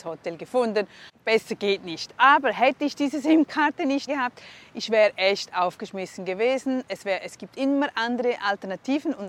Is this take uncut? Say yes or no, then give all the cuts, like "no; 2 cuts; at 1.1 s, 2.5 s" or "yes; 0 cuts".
no; 1 cut; at 4.1 s